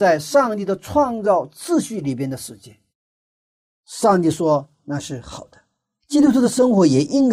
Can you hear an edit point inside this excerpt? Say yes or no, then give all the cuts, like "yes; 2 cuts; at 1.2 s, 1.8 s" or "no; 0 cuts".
no; 0 cuts